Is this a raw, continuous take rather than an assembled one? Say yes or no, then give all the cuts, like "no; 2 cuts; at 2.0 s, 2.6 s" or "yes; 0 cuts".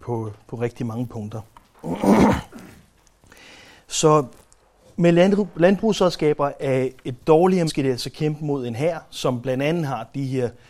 no; 1 cut; at 7.7 s